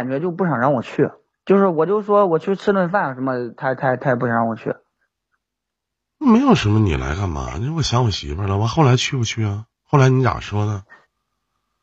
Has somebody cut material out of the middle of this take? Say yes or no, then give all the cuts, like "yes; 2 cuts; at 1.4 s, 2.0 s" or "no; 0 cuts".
yes; 1 cut; at 9.7 s